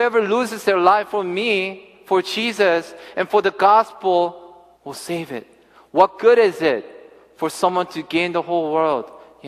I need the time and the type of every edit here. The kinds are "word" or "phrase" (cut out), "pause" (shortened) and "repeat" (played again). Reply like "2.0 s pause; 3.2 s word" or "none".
4.8 s pause